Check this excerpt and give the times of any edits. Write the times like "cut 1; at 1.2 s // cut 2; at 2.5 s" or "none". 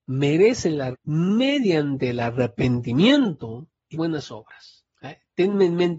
cut 1; at 0.9 s // cut 2; at 3.9 s // cut 3; at 4.9 s